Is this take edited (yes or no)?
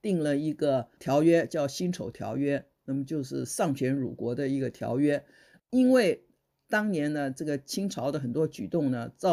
no